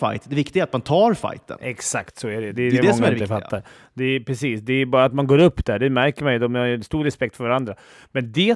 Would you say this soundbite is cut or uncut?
uncut